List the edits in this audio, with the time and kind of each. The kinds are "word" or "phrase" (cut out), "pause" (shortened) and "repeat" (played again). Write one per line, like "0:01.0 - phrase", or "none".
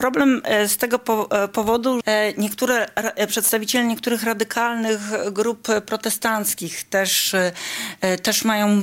0:02.0 - word